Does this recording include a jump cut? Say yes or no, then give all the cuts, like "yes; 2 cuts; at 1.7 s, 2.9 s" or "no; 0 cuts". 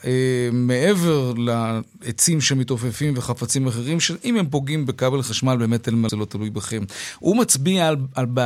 yes; 1 cut; at 6.1 s